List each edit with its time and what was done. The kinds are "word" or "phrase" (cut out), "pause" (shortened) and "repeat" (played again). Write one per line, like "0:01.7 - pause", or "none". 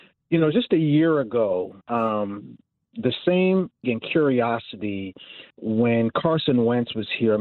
0:01.8 - pause
0:03.8 - word
0:05.5 - pause